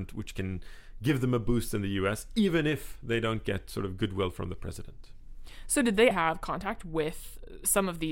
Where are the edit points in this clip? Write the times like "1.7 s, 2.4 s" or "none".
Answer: 6.1 s